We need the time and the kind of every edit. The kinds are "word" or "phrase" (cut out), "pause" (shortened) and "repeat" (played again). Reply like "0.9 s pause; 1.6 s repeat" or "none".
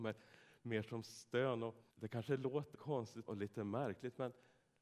1.9 s pause; 2.7 s word; 3.3 s word